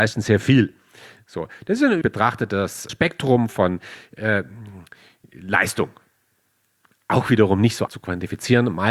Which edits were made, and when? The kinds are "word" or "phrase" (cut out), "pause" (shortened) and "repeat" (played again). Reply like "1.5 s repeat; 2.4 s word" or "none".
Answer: 2.0 s word; 2.9 s word; 7.9 s word